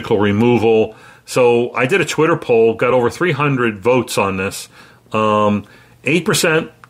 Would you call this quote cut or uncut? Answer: uncut